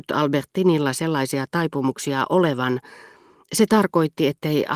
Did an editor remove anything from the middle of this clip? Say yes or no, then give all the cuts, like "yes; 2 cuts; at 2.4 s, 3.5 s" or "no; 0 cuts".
no; 0 cuts